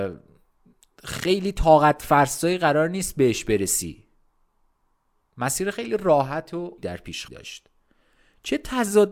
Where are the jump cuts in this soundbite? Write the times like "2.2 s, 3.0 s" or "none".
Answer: 6.8 s, 7.3 s